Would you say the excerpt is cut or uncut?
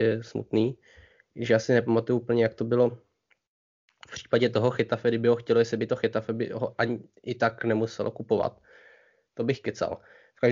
uncut